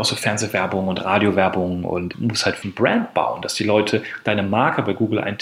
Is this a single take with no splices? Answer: no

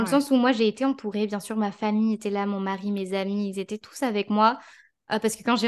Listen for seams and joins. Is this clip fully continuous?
yes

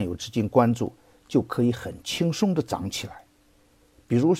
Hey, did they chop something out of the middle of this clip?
no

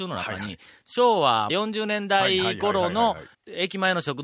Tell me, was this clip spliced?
yes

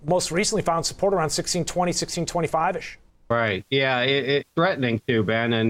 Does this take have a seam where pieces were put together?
yes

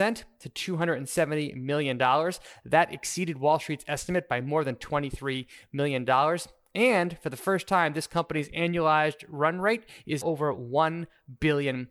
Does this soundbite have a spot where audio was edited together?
yes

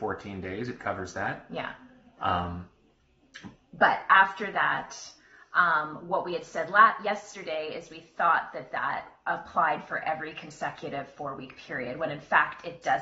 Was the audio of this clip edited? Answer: no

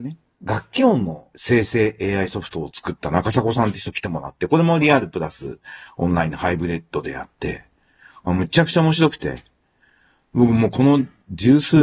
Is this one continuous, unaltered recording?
yes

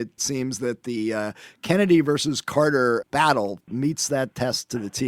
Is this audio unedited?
yes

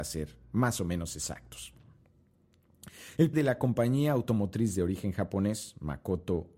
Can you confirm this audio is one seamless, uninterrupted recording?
no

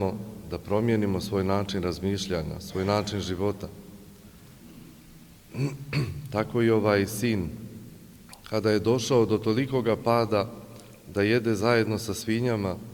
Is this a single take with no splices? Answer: yes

